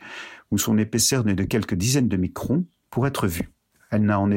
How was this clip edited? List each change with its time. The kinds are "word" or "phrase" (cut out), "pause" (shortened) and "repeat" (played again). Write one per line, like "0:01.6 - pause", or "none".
none